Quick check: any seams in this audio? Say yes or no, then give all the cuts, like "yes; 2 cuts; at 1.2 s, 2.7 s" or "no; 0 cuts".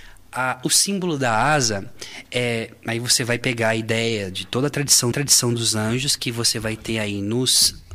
yes; 1 cut; at 5.1 s